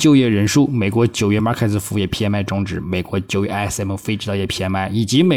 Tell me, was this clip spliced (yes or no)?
no